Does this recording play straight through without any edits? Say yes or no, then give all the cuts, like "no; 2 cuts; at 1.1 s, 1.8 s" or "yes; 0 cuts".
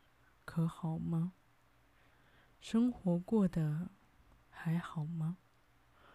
yes; 0 cuts